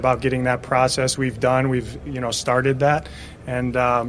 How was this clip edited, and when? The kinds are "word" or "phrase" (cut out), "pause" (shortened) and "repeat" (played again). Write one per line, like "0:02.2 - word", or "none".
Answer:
0:01.2 - word